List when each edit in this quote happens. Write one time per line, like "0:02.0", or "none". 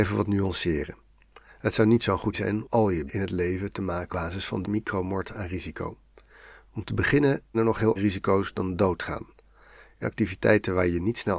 0:02.3
0:02.6
0:03.1
0:04.1
0:04.6
0:07.5
0:08.0
0:10.0